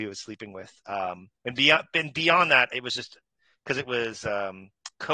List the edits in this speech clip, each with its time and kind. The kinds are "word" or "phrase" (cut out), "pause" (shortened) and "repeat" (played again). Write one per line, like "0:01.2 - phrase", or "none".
0:01.3 - pause